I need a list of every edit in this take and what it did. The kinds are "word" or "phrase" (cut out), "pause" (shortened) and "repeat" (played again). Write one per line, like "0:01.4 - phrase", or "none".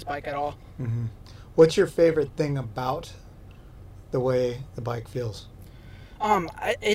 none